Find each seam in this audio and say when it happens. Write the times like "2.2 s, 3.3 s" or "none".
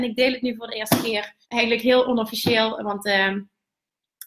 1.4 s